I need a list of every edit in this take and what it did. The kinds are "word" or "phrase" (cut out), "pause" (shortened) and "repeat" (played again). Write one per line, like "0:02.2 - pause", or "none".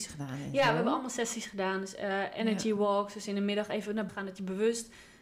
0:04.1 - word